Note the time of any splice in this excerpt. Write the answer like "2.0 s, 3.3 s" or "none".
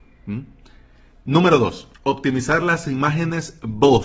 1.9 s

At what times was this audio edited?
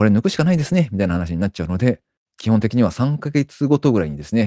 none

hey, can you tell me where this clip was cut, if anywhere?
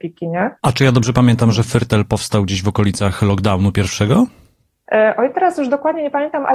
none

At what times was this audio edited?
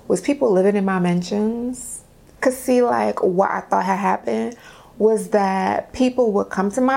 none

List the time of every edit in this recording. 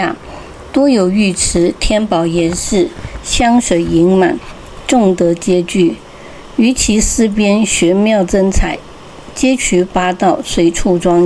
none

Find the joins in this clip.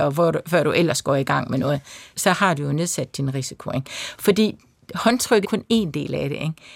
2.1 s, 5.4 s

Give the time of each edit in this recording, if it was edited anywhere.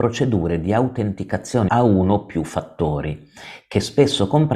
1.7 s

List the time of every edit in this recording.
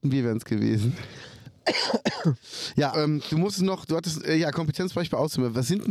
2.9 s

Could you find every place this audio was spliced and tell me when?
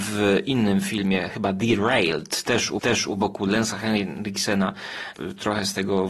2.8 s

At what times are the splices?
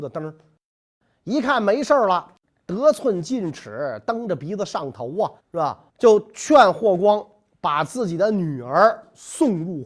2.4 s, 5.4 s, 5.9 s

